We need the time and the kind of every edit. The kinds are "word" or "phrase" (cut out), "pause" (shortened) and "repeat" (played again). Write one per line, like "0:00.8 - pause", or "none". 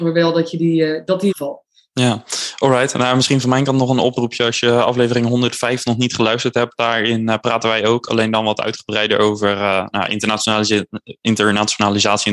0:01.3 - phrase